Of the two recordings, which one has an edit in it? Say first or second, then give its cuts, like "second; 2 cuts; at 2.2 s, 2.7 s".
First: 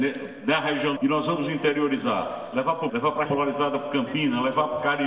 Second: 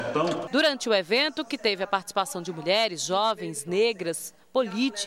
first; 3 cuts; at 1.0 s, 2.9 s, 3.3 s